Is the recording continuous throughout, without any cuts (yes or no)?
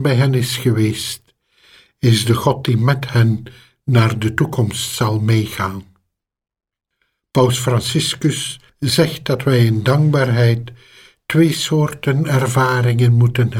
yes